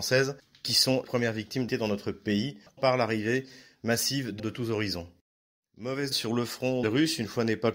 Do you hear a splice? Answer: yes; 6 cuts; at 1.0 s, 1.7 s, 2.8 s, 4.4 s, 6.1 s, 6.8 s

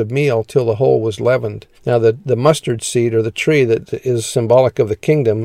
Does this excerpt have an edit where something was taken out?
yes; 1 cut; at 1.7 s

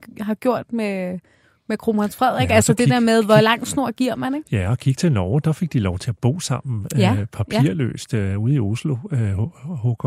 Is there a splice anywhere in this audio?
no; 0 cuts

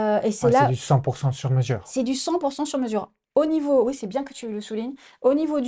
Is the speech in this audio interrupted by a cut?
no; 0 cuts

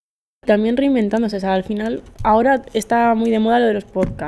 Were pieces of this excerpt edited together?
yes; 1 cut; at 2.1 s

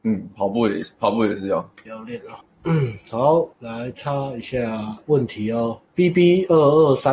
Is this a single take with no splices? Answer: no; 2 cuts; at 3.5 s, 5.8 s

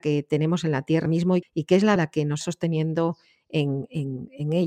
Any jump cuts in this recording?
yes; 4 cuts; at 1.1 s, 1.4 s, 2.0 s, 2.4 s

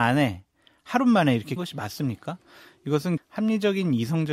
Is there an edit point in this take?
yes; 2 cuts; at 1.6 s, 3.2 s

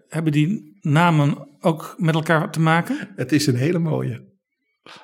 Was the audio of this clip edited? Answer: no; 0 cuts

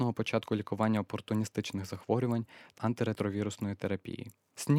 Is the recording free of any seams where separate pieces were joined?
no; 1 cut; at 2.8 s

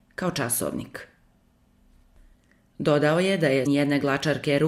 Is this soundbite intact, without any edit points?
no; 1 cut; at 3.7 s

